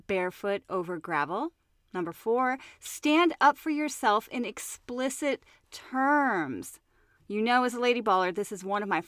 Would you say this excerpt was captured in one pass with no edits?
yes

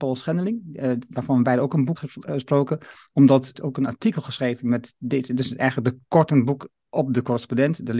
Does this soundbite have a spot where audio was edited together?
yes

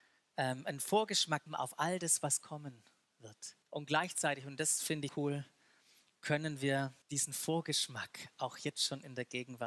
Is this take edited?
yes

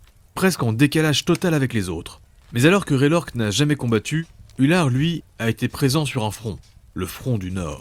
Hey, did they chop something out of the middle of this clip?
no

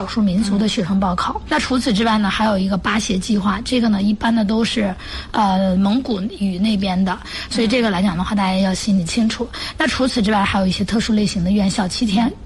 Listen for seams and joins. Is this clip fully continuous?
no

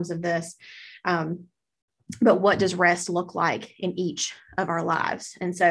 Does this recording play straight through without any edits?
yes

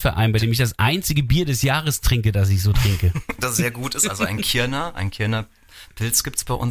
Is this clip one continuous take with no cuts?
yes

